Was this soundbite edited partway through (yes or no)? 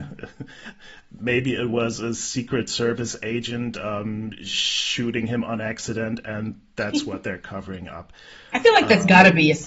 no